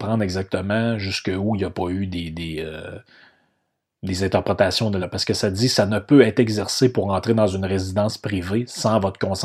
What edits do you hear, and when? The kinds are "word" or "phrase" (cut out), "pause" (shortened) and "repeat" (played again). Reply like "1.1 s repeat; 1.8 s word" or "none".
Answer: 5.0 s word